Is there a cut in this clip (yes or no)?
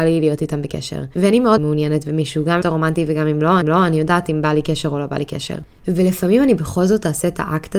yes